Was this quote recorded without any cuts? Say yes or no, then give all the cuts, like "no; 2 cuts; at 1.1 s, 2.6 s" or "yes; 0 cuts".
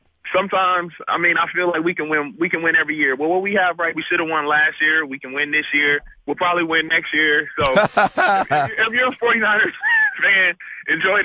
no; 2 cuts; at 3.9 s, 6.2 s